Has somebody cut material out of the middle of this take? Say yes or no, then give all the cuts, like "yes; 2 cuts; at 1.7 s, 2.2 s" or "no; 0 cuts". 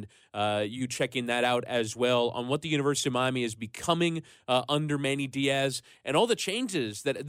no; 0 cuts